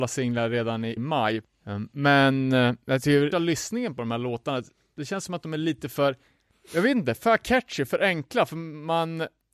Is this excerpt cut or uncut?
cut